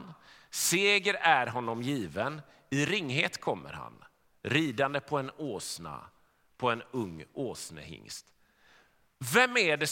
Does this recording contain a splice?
no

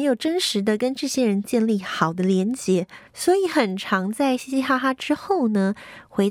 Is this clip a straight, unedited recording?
no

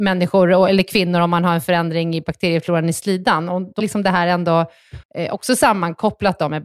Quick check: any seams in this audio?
yes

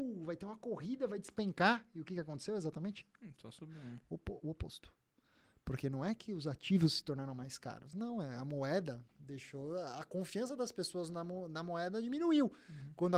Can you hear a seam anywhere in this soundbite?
no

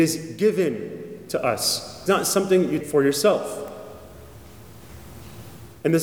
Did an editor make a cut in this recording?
yes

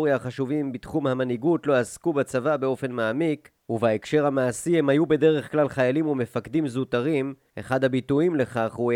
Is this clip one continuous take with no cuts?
yes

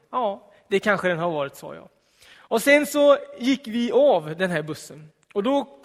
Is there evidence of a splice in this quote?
no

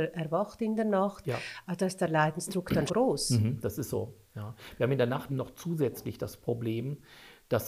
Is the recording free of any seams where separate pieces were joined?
no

